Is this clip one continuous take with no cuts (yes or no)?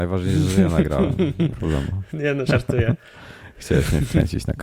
no